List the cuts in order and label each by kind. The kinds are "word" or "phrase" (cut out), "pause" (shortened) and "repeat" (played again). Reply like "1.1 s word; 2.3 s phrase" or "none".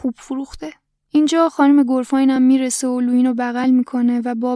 none